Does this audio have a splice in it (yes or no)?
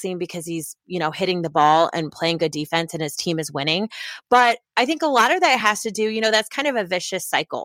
no